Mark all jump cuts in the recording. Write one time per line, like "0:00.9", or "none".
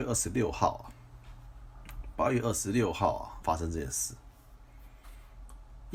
0:03.4

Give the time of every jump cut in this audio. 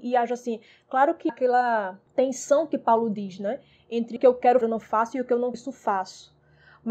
0:01.3
0:04.2
0:04.6
0:05.5

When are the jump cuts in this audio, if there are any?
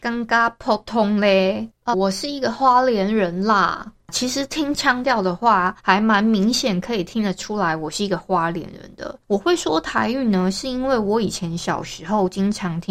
0:01.9
0:05.8
0:09.2

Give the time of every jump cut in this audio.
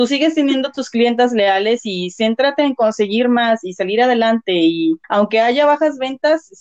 0:05.0

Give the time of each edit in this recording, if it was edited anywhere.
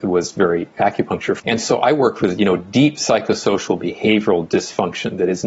0:01.4

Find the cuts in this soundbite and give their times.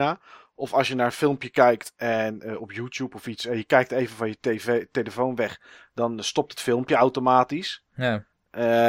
none

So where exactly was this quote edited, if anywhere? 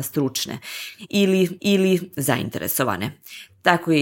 0:01.6

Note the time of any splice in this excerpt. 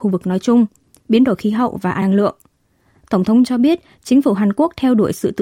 0:02.0
0:03.4

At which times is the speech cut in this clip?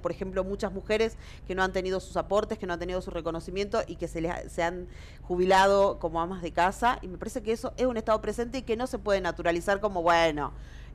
none

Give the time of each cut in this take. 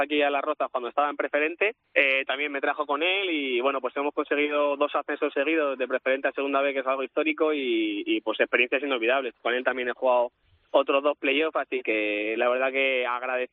0:01.8

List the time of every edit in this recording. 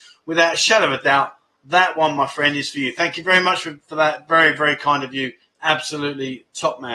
none

